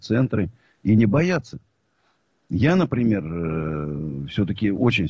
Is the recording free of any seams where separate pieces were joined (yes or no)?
yes